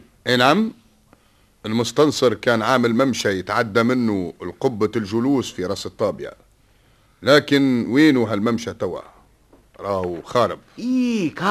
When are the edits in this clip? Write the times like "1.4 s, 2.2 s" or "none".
none